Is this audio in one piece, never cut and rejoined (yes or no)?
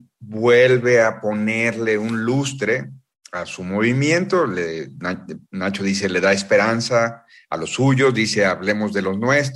yes